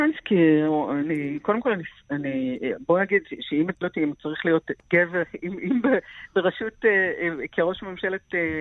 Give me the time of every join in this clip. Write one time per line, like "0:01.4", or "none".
0:03.8